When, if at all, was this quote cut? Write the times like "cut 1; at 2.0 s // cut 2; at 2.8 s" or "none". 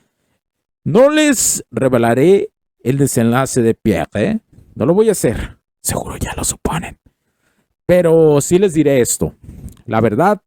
none